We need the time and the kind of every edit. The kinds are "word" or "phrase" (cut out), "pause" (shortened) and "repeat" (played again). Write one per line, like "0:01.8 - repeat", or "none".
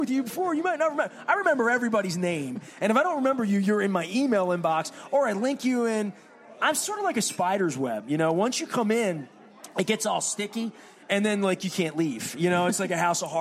none